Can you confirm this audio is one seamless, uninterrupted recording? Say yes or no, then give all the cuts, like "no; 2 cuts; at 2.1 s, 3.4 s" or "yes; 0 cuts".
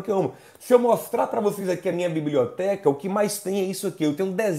yes; 0 cuts